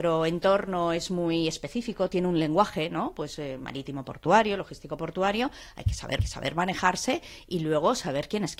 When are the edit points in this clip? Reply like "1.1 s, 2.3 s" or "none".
3.6 s, 6.2 s